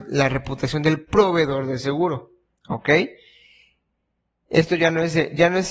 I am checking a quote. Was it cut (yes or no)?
no